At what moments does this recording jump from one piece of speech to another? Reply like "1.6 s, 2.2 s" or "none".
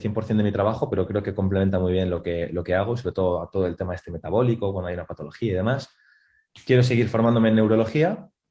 none